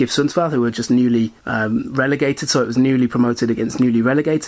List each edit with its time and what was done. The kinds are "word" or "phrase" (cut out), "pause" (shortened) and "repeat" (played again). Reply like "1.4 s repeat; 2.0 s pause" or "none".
1.4 s pause